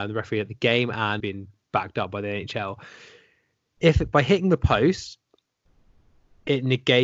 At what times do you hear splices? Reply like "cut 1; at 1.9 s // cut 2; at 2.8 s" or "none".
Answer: cut 1; at 1.2 s